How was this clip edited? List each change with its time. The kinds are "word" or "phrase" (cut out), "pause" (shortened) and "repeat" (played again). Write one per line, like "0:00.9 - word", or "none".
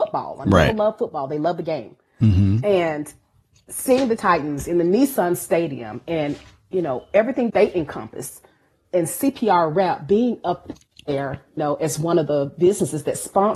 0:04.2 - word
0:07.5 - word
0:11.6 - word